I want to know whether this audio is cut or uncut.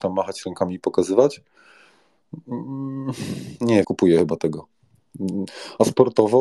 cut